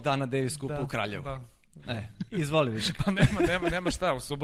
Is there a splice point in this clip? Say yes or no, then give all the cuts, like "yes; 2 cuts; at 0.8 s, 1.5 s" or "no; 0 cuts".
no; 0 cuts